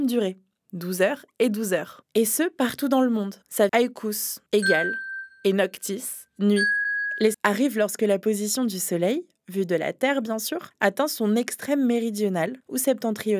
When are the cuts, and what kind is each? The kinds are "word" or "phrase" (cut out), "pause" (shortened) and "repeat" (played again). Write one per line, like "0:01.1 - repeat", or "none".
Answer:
0:03.7 - phrase
0:04.5 - pause
0:06.3 - pause
0:07.3 - phrase